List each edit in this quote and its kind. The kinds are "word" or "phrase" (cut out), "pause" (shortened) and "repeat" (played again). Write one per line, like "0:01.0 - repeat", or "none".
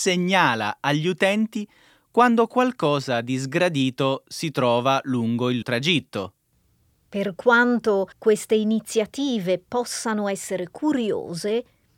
0:05.6 - word
0:08.1 - pause